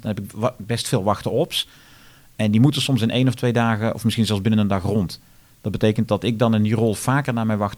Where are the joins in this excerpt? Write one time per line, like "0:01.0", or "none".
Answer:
none